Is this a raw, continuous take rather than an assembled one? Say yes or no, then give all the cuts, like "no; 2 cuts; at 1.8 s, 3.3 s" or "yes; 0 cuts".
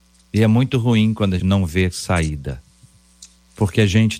no; 1 cut; at 1.4 s